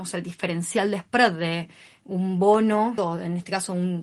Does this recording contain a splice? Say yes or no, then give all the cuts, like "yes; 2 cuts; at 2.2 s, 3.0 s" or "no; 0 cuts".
yes; 1 cut; at 3.0 s